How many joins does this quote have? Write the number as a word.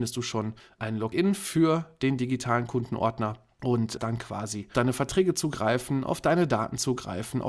two